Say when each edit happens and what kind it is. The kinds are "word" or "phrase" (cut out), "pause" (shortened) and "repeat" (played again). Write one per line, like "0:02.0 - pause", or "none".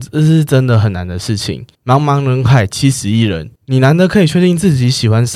0:01.7 - pause
0:03.6 - pause